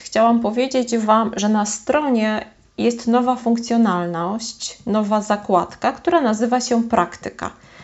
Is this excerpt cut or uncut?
uncut